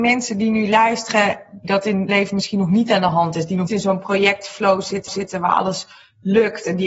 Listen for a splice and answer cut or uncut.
cut